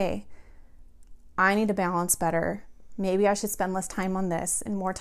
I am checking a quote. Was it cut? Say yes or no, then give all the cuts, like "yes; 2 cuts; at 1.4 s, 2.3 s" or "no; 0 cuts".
no; 0 cuts